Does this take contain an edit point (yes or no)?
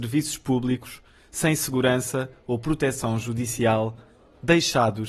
no